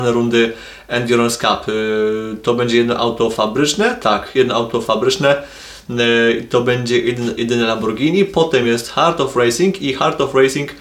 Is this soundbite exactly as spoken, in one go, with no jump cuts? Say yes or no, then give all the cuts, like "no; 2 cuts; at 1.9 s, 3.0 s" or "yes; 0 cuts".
yes; 0 cuts